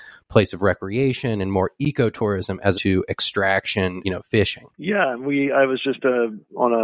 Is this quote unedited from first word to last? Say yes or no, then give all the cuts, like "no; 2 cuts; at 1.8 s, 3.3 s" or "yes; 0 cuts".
no; 3 cuts; at 2.7 s, 4.0 s, 4.7 s